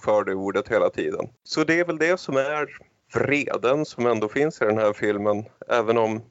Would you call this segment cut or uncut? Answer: cut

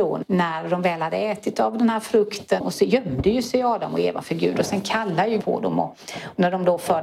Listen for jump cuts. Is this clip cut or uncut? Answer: cut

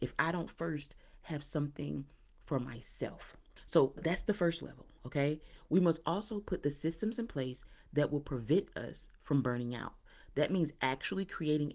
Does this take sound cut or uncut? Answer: uncut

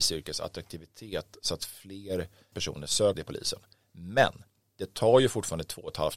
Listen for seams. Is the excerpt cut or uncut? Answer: cut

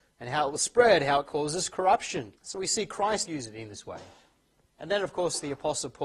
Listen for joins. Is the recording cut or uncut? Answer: cut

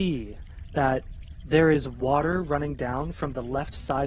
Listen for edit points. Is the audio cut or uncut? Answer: uncut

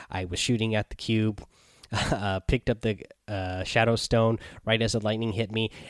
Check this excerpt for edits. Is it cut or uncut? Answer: uncut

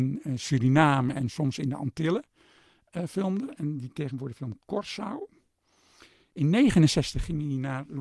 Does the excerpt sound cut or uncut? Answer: uncut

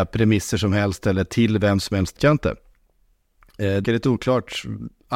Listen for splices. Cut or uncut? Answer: cut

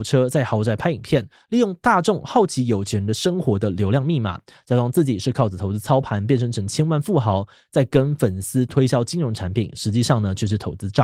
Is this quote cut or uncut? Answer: uncut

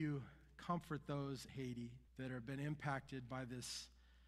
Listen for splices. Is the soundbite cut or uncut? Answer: cut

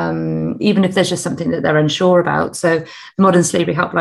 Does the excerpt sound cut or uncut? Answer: uncut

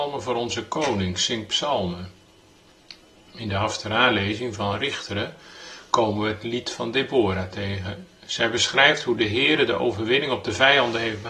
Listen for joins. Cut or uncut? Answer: uncut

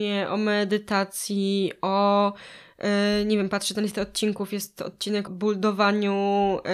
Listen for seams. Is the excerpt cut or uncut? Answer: cut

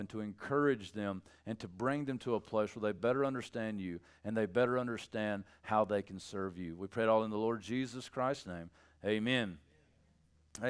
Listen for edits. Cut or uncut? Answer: uncut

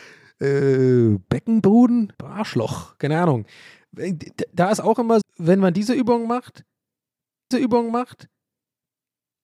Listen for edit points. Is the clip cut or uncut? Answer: cut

